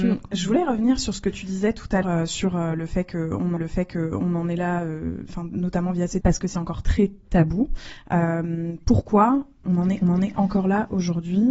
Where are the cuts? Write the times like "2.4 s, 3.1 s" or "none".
2.0 s, 3.6 s, 6.2 s, 10.0 s